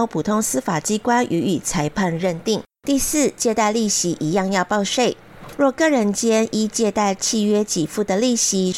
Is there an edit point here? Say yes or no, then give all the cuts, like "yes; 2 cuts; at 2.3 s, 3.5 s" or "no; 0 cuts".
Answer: yes; 1 cut; at 2.7 s